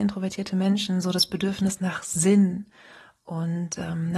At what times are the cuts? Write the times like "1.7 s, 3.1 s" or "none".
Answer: none